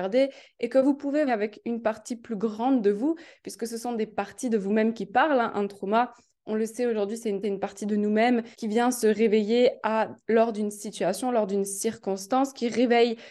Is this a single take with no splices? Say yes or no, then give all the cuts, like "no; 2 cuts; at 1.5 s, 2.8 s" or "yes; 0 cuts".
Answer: no; 3 cuts; at 1.3 s, 7.4 s, 8.5 s